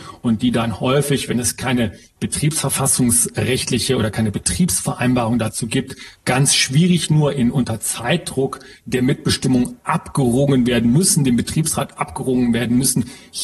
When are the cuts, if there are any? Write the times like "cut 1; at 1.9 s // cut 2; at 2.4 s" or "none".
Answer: none